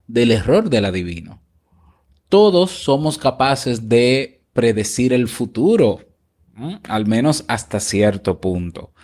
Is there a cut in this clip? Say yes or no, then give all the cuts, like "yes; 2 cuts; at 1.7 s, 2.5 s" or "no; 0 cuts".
no; 0 cuts